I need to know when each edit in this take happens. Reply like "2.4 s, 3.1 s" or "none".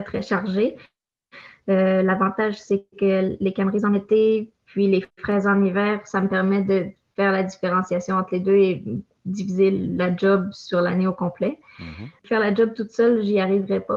2.9 s, 5.1 s, 12.2 s